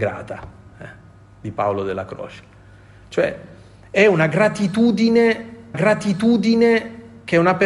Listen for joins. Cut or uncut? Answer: cut